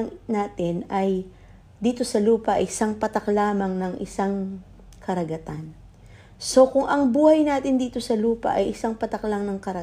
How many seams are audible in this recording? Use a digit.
0